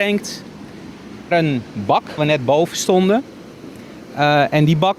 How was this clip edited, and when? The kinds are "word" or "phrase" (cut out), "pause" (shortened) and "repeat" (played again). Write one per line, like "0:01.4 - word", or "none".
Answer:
0:01.3 - word
0:02.2 - word